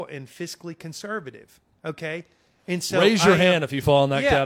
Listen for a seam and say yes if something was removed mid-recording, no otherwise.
no